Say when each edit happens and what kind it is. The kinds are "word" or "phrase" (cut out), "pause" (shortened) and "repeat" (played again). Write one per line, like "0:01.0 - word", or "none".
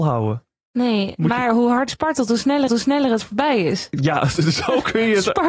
0:01.9 - word
0:02.7 - repeat